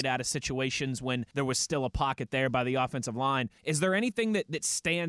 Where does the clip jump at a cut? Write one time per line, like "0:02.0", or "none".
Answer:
0:01.3
0:03.6